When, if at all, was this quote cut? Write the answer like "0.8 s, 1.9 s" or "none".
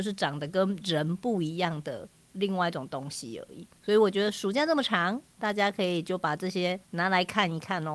3.8 s, 6.8 s